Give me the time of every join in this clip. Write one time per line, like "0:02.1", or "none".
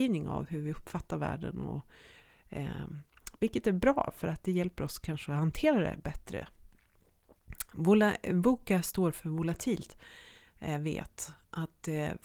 none